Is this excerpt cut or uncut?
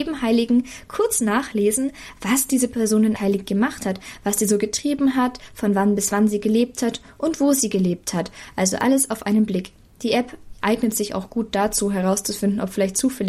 cut